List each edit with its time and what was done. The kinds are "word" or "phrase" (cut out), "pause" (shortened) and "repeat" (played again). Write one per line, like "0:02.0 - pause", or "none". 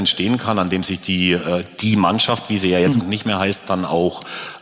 0:03.0 - phrase